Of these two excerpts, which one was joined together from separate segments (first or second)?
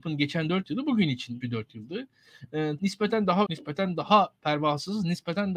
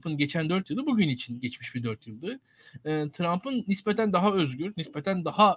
first